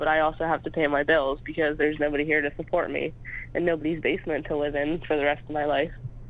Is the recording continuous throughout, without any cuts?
yes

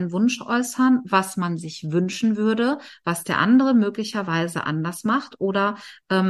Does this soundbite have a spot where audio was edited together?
no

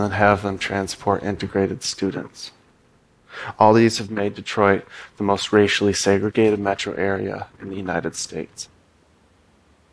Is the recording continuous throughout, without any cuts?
yes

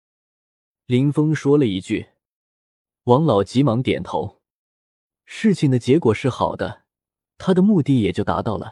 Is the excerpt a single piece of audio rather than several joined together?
yes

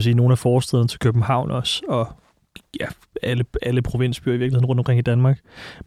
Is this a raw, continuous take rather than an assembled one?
yes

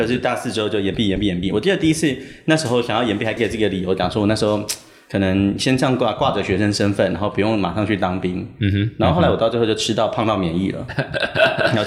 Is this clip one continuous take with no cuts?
yes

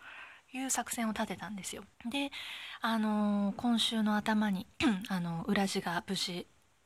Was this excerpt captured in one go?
no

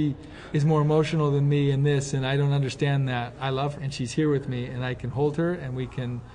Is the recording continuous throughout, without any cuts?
no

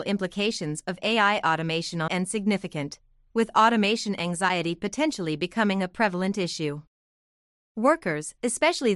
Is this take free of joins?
no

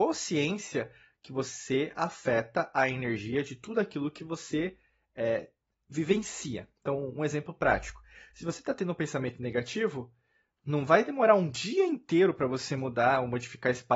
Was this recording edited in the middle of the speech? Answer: no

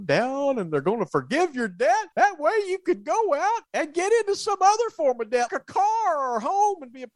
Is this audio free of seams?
no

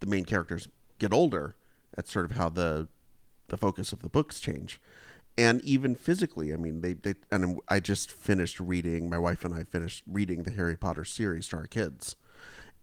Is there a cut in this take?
no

